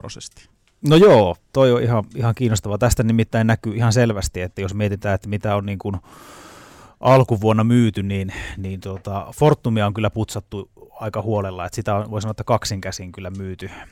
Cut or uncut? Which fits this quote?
uncut